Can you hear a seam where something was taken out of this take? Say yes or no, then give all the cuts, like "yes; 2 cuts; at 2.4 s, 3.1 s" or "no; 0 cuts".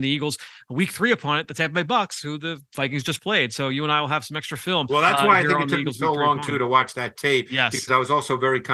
no; 0 cuts